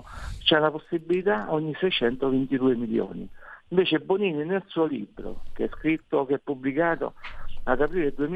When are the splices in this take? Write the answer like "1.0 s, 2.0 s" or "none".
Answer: none